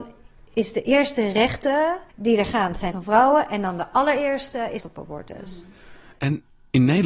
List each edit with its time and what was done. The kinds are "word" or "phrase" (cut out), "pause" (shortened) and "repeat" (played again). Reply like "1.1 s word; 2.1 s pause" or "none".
2.1 s pause; 2.9 s phrase; 4.8 s phrase